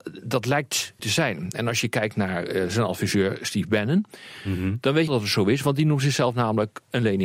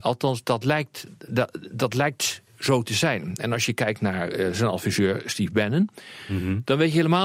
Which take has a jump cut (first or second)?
first